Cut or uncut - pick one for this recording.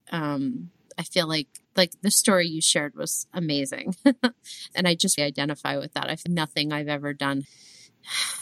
cut